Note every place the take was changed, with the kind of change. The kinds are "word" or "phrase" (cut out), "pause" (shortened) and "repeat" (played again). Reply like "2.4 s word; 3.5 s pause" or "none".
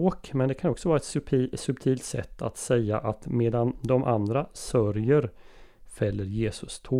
none

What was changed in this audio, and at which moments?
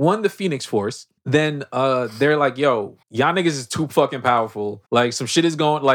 1.2 s pause; 3.0 s pause; 4.9 s pause

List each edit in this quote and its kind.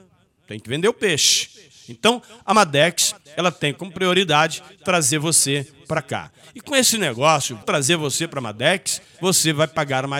7.6 s word

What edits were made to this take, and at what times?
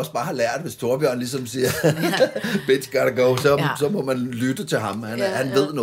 none

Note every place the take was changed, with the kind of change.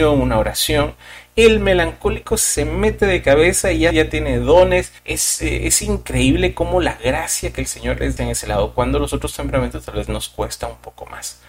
3.9 s phrase; 5.0 s pause; 8.2 s phrase

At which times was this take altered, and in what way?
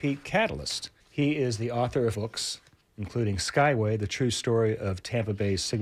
1.0 s pause; 2.1 s word; 2.8 s pause

